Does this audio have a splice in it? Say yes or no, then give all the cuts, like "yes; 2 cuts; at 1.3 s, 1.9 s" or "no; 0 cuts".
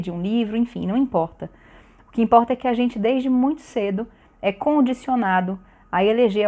no; 0 cuts